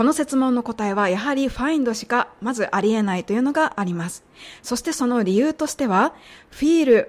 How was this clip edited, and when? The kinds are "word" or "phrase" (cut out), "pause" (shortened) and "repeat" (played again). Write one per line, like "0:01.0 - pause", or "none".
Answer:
none